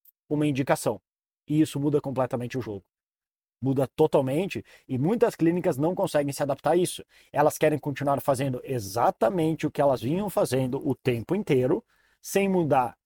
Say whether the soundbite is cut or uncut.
uncut